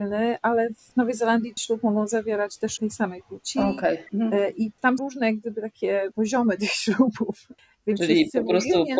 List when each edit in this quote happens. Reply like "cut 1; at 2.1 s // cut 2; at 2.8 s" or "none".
cut 1; at 1.6 s // cut 2; at 2.8 s // cut 3; at 4.1 s // cut 4; at 5.0 s // cut 5; at 7.6 s